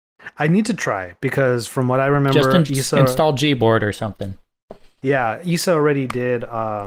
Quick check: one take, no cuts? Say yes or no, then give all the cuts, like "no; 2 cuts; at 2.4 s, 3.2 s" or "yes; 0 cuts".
yes; 0 cuts